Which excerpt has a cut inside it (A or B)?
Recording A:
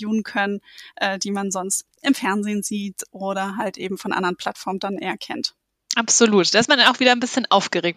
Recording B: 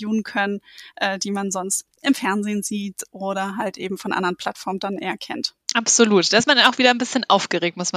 B